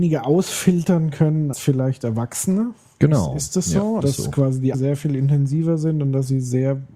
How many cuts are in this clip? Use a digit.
3